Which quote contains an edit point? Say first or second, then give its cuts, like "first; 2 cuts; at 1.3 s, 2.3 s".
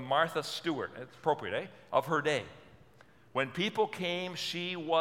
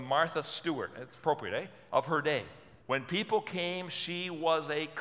second; 1 cut; at 2.8 s